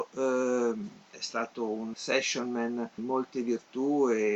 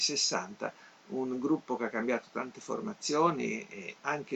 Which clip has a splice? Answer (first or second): first